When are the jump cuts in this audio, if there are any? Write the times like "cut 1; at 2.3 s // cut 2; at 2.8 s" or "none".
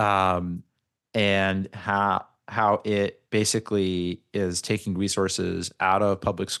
none